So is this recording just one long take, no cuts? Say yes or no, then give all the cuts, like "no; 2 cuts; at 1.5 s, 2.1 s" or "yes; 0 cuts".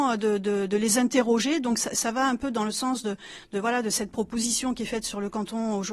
yes; 0 cuts